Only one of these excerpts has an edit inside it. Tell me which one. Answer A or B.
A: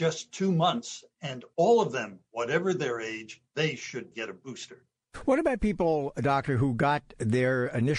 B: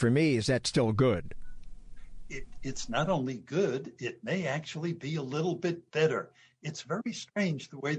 A